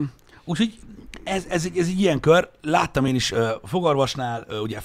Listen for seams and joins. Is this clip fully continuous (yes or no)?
yes